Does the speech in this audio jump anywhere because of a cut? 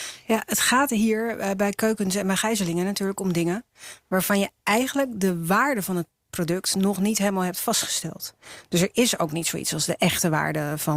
no; 0 cuts

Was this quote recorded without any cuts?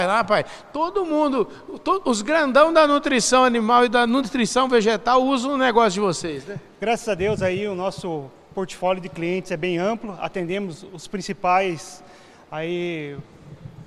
yes; 0 cuts

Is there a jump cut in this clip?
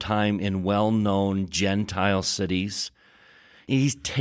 no; 0 cuts

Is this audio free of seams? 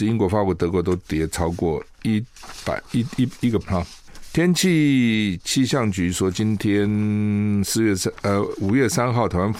no; 1 cut; at 3.6 s

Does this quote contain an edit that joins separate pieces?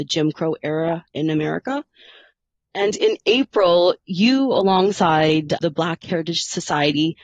no; 0 cuts

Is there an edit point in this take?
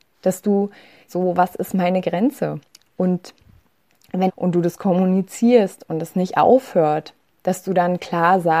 yes; 3 cuts; at 1.1 s, 2.7 s, 4.3 s

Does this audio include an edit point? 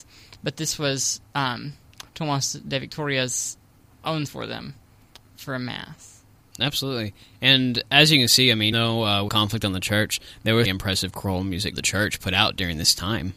yes; 8 cuts; at 2.1 s, 4.3 s, 5.2 s, 6.4 s, 8.7 s, 9.3 s, 10.7 s, 11.7 s

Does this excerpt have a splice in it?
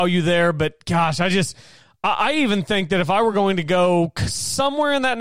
no; 0 cuts

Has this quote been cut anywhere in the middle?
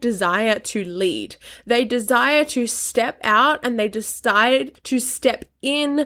yes; 1 cut; at 4.7 s

